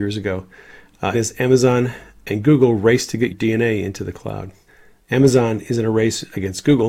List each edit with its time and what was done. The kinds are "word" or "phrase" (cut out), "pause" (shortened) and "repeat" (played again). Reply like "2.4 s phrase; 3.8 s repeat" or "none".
1.1 s word; 3.3 s word; 4.7 s pause